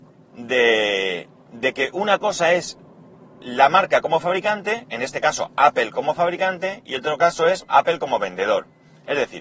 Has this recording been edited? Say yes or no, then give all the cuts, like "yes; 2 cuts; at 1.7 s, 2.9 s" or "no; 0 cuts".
no; 0 cuts